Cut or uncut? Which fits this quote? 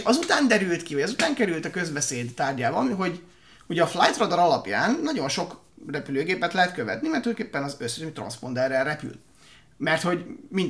uncut